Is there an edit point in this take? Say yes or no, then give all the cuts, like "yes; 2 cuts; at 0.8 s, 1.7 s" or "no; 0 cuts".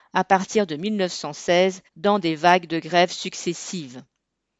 yes; 1 cut; at 1.9 s